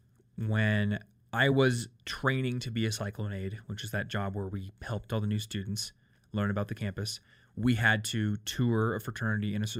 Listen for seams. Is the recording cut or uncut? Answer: uncut